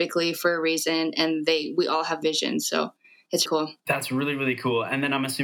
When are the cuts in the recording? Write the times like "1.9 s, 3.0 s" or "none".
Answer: 2.2 s, 3.5 s